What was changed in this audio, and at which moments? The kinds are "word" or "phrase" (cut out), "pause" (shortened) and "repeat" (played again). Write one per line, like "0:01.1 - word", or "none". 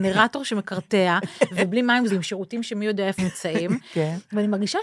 0:02.1 - word
0:03.2 - word